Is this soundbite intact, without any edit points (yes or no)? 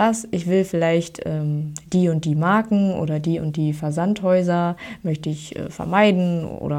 yes